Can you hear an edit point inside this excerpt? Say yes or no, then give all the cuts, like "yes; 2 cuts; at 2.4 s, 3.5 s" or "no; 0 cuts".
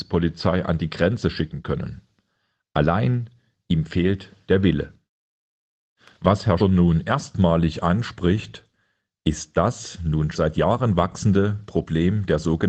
yes; 2 cuts; at 6.6 s, 10.3 s